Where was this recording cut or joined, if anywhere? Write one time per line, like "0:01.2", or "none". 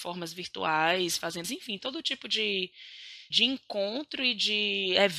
0:01.4
0:03.3